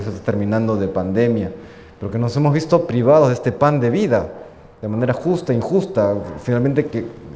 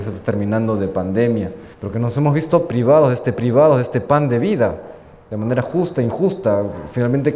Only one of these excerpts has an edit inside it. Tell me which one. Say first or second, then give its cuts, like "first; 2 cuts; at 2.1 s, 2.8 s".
second; 2 cuts; at 1.7 s, 3.4 s